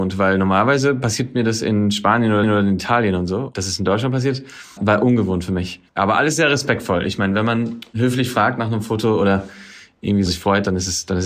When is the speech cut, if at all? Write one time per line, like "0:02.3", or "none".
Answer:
0:02.4
0:04.8
0:05.9
0:10.3

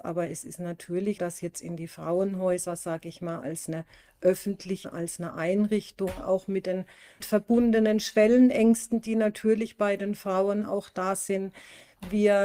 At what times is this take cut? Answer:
0:01.2
0:04.8
0:07.2

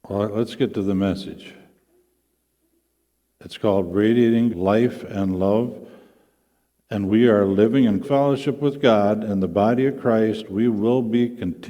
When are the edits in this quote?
0:04.5
0:07.1
0:08.0

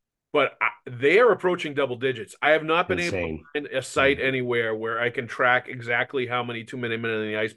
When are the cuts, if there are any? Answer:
none

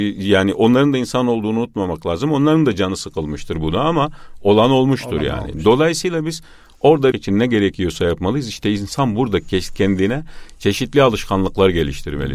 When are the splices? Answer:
0:07.1

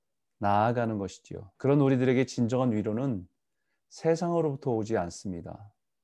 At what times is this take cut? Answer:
0:01.5

